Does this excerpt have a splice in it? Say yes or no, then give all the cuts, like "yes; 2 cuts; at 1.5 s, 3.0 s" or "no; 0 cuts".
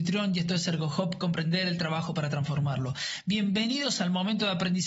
no; 0 cuts